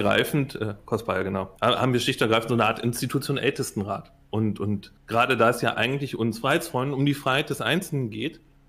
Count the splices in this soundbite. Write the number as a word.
two